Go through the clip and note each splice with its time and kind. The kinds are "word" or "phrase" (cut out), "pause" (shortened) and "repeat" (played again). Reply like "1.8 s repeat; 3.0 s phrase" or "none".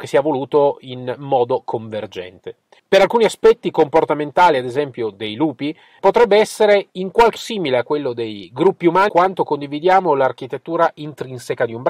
2.8 s pause; 6.0 s word; 7.4 s word; 9.1 s word